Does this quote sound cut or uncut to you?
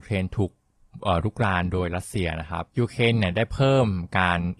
cut